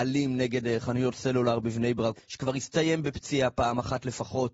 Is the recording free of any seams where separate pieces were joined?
no; 1 cut; at 2.2 s

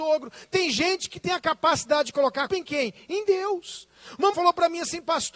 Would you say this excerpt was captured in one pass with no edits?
no; 2 cuts; at 2.5 s, 4.3 s

